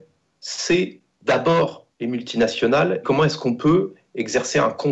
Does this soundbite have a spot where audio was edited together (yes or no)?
yes